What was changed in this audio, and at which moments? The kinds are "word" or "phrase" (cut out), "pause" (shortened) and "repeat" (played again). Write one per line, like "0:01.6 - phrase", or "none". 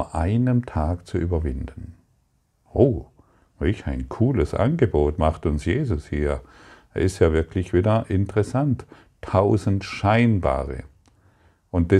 none